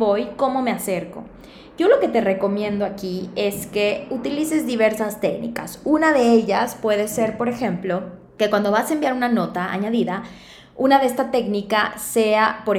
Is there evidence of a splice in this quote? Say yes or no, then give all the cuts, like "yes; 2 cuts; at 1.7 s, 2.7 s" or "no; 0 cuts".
no; 0 cuts